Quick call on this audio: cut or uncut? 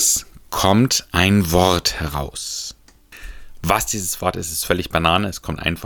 uncut